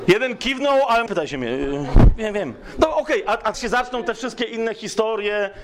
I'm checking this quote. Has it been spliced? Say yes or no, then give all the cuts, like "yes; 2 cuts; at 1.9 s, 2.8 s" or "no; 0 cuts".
yes; 2 cuts; at 1.1 s, 3.5 s